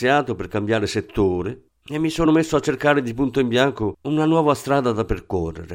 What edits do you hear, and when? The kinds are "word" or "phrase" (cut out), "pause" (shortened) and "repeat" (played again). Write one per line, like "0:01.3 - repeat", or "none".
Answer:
none